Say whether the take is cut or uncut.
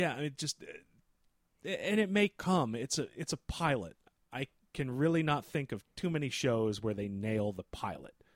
uncut